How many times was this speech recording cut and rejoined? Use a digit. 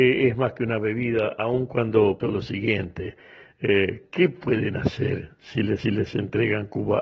2